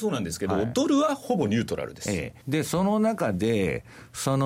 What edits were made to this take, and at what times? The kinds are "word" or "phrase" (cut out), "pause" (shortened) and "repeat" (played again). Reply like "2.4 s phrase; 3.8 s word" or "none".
2.4 s pause